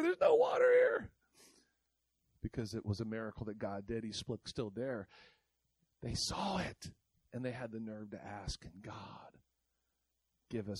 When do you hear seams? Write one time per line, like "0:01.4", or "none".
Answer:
0:04.4